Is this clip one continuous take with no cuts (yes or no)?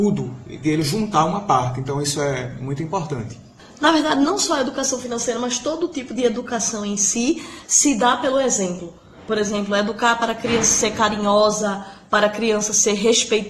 yes